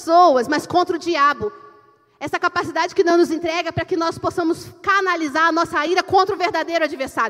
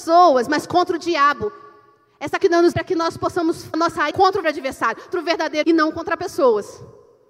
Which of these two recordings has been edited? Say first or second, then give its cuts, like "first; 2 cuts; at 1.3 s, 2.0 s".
second; 7 cuts; at 2.4 s, 2.7 s, 3.7 s, 4.1 s, 4.4 s, 5.1 s, 5.6 s